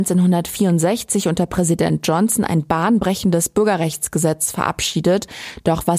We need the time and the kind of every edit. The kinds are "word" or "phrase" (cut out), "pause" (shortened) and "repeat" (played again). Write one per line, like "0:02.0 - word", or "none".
none